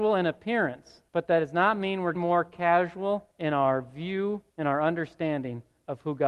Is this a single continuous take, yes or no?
no